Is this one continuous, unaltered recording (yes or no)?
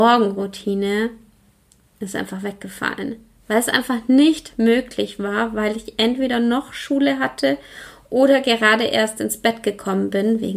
yes